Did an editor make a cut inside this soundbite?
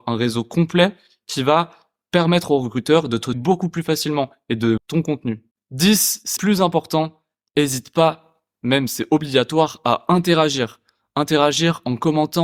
yes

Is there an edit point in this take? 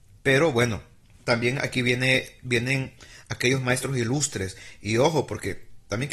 no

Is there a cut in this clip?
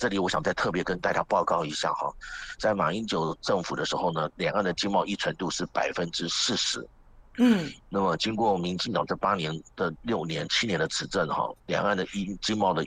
yes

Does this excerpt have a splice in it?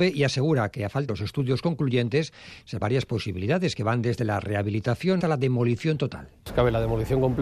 yes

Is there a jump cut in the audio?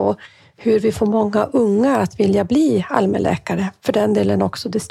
no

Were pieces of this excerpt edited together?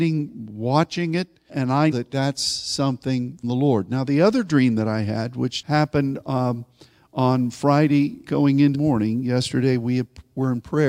yes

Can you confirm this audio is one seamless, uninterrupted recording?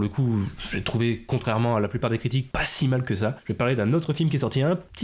yes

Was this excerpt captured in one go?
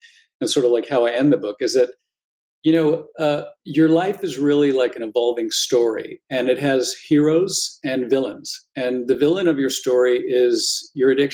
yes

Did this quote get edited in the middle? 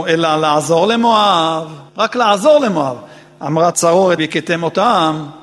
yes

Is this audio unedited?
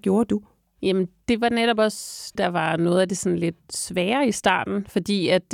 no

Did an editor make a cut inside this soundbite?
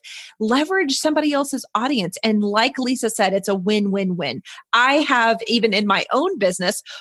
no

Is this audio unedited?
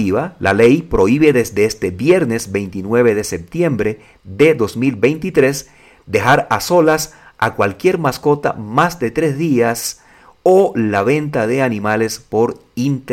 yes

